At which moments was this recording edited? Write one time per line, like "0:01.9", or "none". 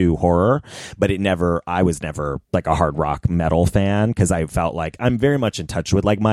0:02.4